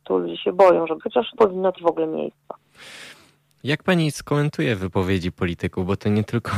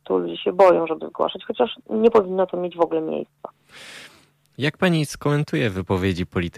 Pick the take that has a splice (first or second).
first